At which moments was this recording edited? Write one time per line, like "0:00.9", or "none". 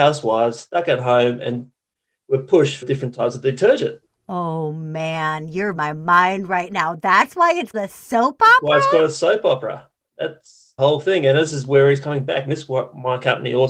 0:02.8
0:05.8
0:07.7
0:10.8